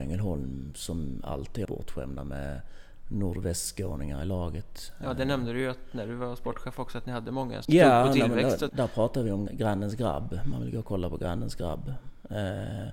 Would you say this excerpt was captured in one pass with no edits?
no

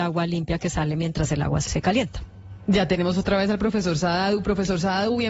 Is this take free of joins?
no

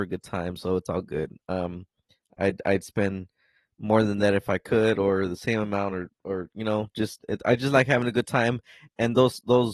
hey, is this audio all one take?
yes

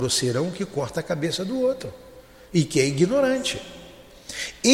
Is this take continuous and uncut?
yes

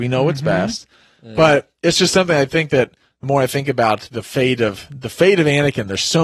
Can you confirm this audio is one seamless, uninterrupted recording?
yes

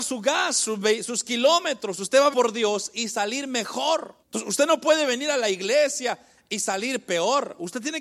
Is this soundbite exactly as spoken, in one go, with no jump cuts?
no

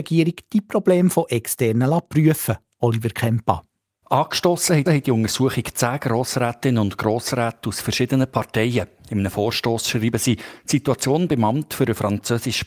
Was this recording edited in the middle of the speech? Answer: yes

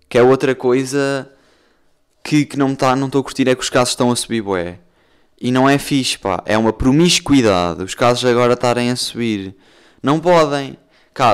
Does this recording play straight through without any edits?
yes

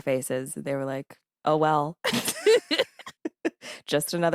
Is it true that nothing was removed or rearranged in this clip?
yes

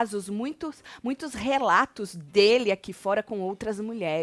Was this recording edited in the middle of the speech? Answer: no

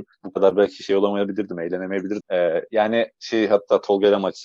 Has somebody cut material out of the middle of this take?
yes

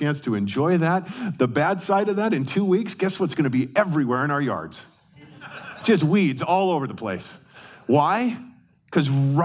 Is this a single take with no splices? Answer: yes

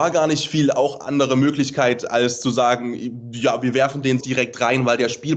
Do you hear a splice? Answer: yes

